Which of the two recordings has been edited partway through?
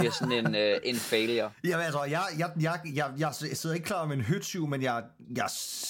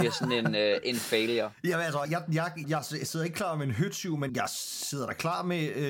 second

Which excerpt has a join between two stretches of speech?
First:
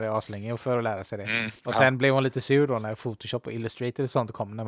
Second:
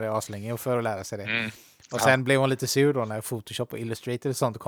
first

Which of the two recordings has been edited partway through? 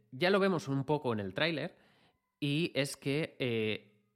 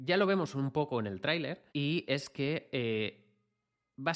second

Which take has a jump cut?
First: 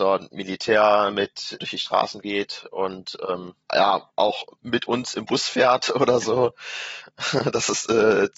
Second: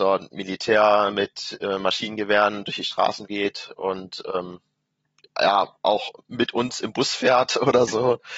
first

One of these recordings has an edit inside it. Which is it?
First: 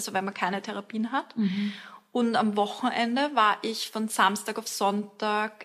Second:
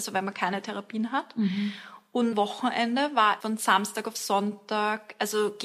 second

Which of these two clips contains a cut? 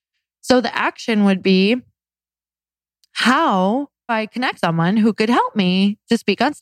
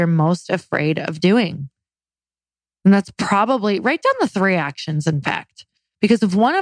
first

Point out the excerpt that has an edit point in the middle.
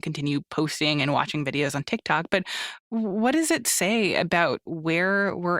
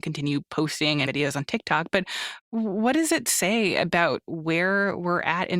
second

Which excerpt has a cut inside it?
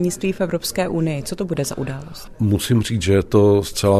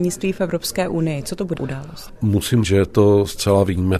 second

